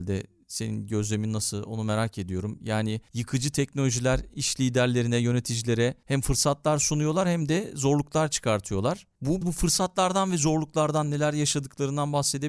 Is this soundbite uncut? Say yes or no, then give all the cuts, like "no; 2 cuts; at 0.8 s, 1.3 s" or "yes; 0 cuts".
no; 1 cut; at 9.4 s